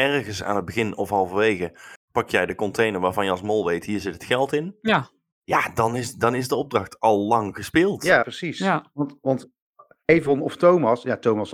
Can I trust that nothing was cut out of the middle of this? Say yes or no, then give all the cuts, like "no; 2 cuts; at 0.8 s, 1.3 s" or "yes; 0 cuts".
yes; 0 cuts